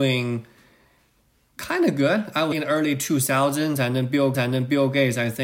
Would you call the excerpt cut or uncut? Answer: cut